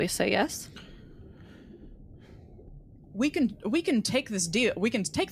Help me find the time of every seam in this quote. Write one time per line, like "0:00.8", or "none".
none